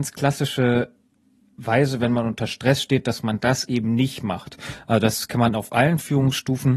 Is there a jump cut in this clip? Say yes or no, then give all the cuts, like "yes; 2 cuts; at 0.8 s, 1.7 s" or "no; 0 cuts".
no; 0 cuts